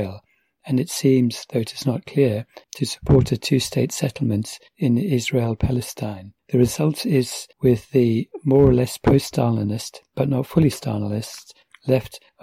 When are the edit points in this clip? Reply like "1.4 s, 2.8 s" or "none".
2.6 s, 6.4 s, 7.5 s